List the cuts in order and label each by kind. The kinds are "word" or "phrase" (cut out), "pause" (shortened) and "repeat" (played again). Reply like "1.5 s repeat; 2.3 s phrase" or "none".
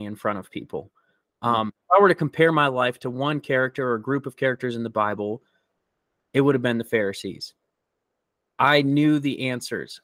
none